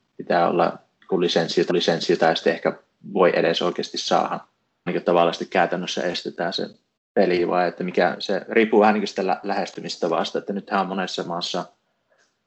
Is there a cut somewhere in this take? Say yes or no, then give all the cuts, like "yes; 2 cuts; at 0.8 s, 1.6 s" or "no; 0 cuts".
yes; 3 cuts; at 1.7 s, 4.9 s, 7.0 s